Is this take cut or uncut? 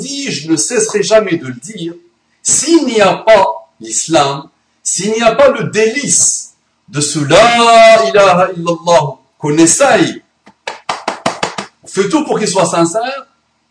uncut